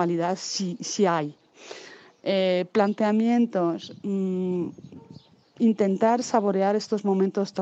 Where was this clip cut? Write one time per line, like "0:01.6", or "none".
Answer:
none